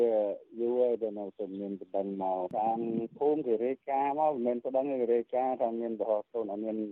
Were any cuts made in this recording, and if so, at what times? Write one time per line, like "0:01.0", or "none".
none